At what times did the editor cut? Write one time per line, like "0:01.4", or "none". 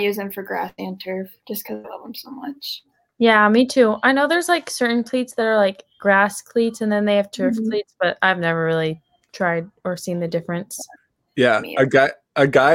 none